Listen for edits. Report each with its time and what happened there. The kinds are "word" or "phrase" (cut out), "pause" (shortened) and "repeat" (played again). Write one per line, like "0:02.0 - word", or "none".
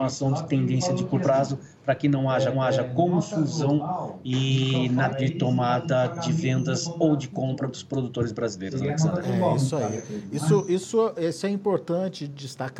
0:01.2 - word
0:02.5 - repeat
0:05.1 - word